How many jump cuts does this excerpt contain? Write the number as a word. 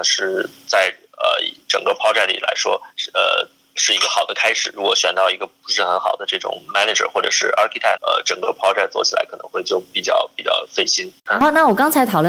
three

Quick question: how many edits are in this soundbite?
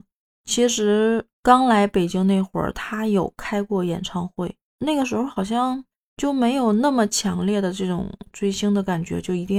two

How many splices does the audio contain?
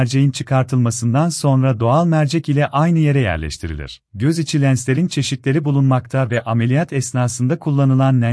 one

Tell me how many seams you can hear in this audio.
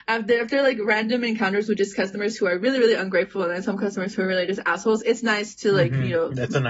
zero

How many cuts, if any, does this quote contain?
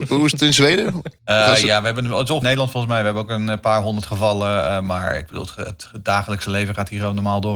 two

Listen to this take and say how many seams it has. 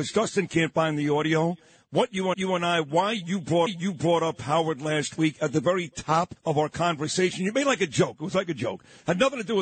three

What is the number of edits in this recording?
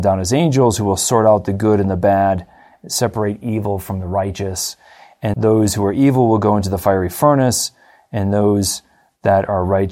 one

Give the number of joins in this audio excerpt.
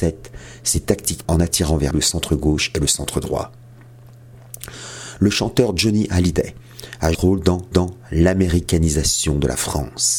four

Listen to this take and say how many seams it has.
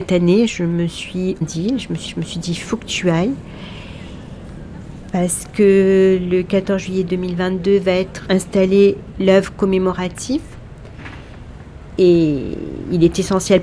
three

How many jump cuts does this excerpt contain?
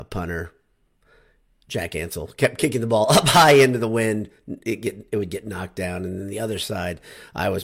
zero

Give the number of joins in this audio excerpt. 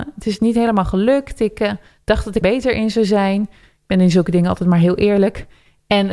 one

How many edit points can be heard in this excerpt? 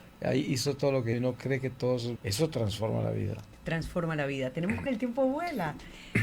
three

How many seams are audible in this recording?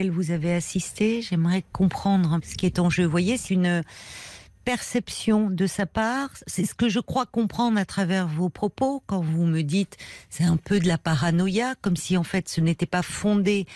two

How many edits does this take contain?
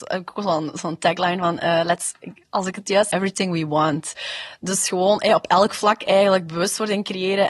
one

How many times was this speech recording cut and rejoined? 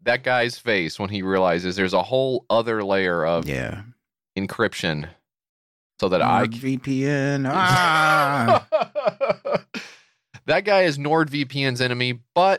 zero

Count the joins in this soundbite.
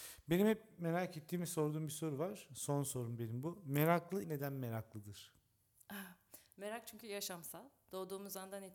one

